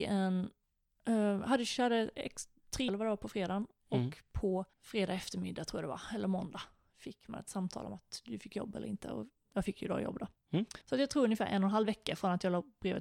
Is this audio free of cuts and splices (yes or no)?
no